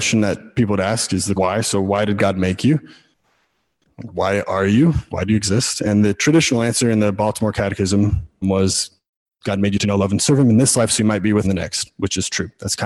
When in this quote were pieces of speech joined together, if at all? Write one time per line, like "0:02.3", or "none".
0:01.4
0:08.4
0:11.4